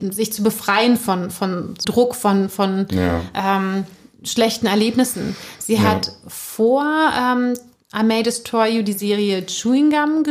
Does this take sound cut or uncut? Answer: cut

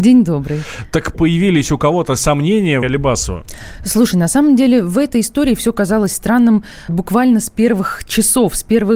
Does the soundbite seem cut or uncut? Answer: cut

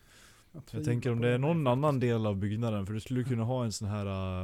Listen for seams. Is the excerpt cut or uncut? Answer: uncut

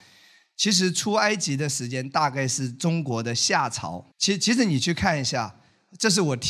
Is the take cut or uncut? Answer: cut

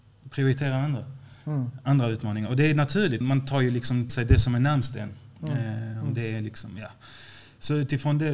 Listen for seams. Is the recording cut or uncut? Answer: cut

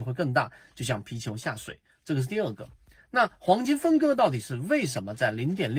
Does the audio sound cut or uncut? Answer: uncut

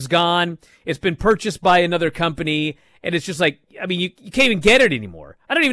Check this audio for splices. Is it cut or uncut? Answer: uncut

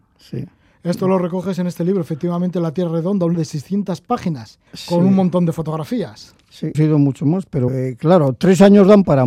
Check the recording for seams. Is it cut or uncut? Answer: cut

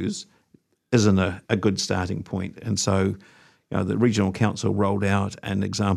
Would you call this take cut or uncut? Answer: cut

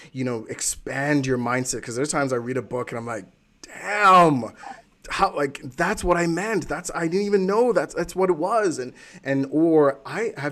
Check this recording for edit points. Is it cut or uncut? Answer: uncut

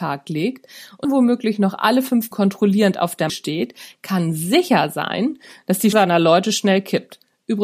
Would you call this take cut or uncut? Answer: cut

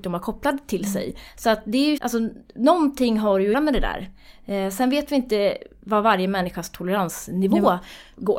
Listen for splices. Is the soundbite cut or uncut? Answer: cut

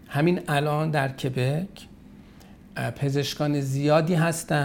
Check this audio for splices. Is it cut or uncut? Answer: uncut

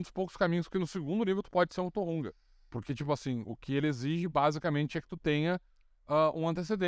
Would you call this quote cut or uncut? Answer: uncut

